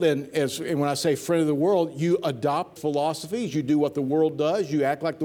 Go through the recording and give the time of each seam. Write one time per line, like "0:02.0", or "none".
0:02.8